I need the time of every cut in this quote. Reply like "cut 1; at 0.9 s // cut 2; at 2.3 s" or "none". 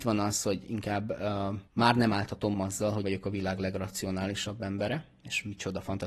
cut 1; at 1.7 s // cut 2; at 2.5 s // cut 3; at 3.0 s